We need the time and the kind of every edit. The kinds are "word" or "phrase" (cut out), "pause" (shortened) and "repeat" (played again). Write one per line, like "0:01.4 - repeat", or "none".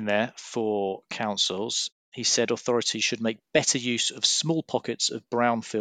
none